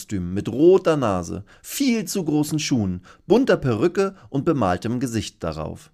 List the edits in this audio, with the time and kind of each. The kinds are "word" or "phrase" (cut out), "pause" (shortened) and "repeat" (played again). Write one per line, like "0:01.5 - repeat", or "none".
none